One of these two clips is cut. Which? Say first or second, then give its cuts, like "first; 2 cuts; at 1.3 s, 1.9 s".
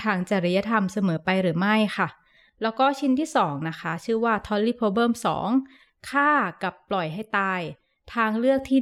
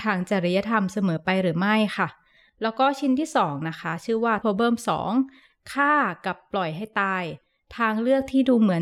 second; 1 cut; at 4.4 s